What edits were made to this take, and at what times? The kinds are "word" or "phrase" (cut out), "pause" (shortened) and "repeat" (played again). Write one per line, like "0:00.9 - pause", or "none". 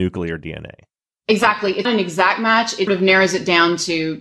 0:01.8 - word
0:02.9 - word